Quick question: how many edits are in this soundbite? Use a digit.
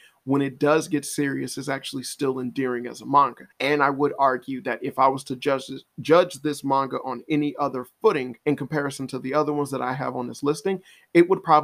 2